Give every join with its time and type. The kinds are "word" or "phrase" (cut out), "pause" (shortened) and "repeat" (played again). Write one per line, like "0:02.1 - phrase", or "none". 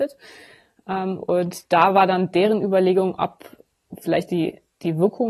none